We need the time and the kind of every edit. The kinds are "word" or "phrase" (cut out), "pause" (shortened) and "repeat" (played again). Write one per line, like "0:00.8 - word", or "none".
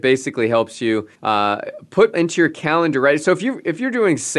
0:01.1 - pause
0:02.1 - word